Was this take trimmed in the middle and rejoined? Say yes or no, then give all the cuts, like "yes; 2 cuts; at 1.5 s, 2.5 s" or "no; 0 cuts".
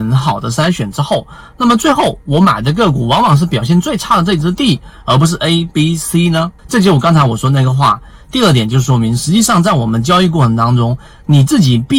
yes; 1 cut; at 6.6 s